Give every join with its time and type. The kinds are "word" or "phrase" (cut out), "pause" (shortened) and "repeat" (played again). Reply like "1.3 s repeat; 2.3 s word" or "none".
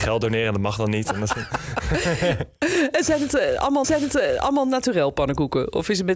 3.8 s repeat